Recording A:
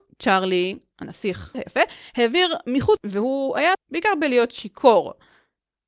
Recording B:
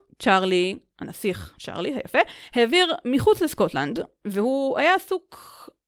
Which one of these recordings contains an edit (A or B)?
A